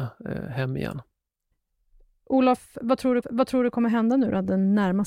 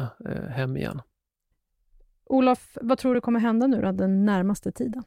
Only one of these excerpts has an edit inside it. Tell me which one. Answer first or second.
first